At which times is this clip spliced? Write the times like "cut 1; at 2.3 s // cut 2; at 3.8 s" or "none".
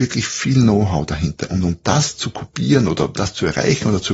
none

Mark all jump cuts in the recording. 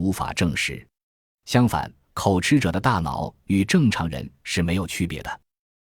cut 1; at 2.0 s

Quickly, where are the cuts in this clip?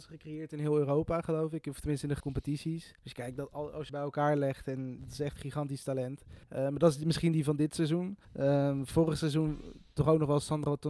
cut 1; at 2.2 s // cut 2; at 3.0 s // cut 3; at 3.9 s // cut 4; at 5.0 s // cut 5; at 5.4 s // cut 6; at 6.4 s // cut 7; at 8.2 s

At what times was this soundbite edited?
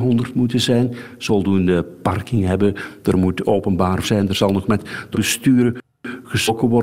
cut 1; at 1.3 s // cut 2; at 4.0 s // cut 3; at 5.1 s

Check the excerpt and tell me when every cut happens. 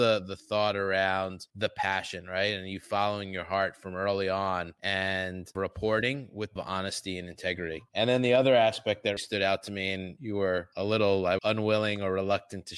cut 1; at 6.6 s // cut 2; at 9.2 s // cut 3; at 11.4 s

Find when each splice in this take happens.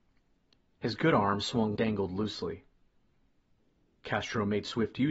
cut 1; at 1.8 s

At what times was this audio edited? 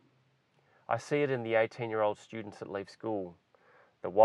none

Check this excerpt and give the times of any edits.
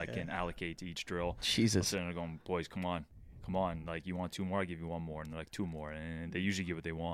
none

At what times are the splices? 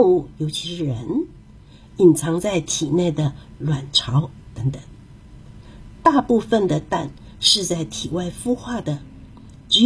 none

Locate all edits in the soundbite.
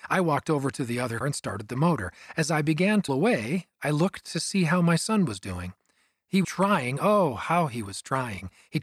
cut 1; at 1.2 s // cut 2; at 3.1 s // cut 3; at 6.4 s

